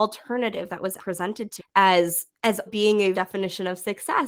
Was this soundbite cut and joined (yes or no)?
yes